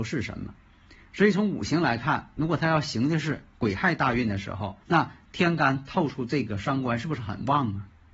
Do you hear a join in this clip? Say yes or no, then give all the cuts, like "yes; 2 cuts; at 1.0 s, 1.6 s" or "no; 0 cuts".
yes; 1 cut; at 4.8 s